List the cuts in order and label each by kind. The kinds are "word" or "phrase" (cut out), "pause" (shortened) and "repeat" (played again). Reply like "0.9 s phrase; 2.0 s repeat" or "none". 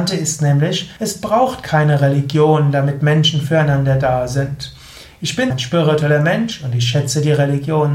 1.0 s pause; 5.5 s word